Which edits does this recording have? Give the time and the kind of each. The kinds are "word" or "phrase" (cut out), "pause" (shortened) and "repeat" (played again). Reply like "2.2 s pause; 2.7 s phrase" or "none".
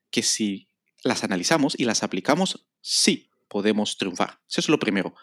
none

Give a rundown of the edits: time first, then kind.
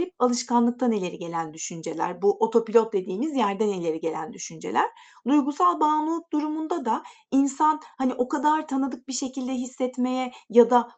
none

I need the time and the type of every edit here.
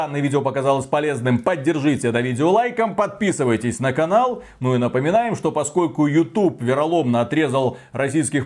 none

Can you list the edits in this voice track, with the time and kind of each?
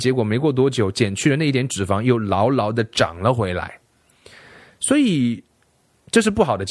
none

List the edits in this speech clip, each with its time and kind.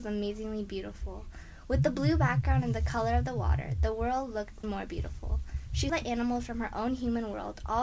4.6 s word; 5.9 s word

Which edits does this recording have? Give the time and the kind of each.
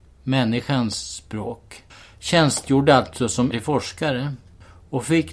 1.9 s pause; 3.5 s word

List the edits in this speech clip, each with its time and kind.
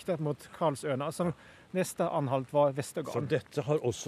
none

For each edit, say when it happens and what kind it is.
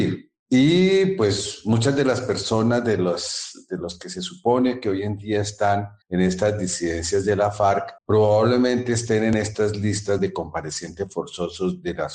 6.0 s pause; 8.0 s pause

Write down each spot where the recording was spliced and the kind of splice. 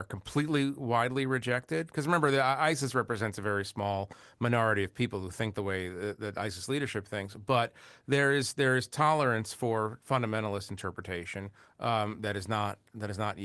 none

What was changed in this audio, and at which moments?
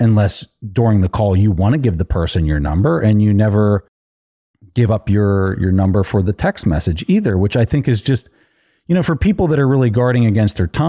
none

